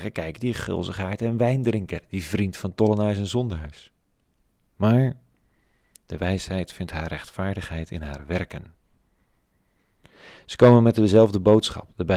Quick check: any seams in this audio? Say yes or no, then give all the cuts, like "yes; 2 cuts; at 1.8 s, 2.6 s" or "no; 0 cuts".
no; 0 cuts